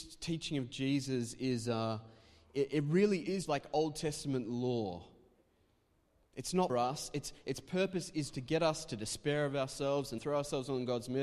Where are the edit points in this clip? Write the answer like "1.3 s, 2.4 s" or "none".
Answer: 3.4 s, 6.7 s, 8.3 s, 10.2 s